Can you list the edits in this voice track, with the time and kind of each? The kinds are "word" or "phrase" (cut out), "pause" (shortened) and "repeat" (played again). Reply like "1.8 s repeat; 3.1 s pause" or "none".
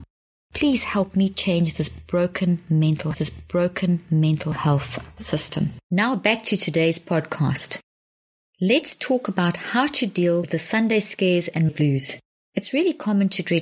3.1 s repeat; 5.8 s pause; 11.7 s word